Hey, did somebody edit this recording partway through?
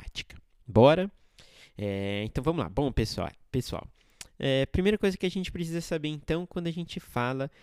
no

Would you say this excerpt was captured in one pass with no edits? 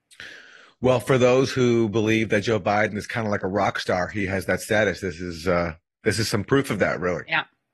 yes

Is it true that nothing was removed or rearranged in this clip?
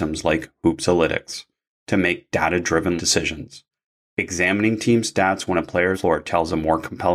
no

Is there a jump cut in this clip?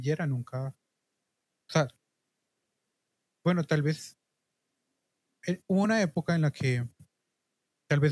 no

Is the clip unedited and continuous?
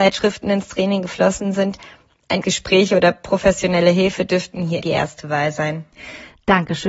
no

